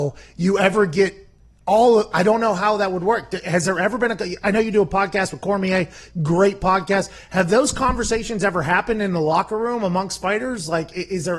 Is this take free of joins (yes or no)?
yes